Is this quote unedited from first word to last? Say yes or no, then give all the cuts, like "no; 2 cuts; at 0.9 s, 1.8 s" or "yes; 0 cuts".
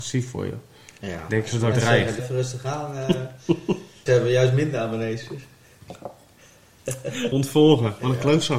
no; 4 cuts; at 1.7 s, 2.2 s, 4.1 s, 7.3 s